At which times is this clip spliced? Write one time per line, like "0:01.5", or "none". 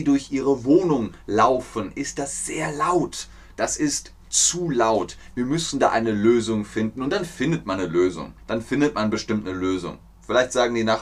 0:08.4